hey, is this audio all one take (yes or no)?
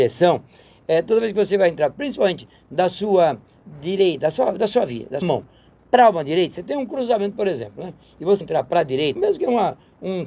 no